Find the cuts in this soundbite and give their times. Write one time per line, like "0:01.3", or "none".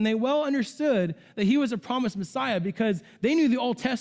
none